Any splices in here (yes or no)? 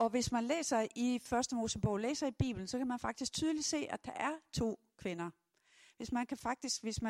no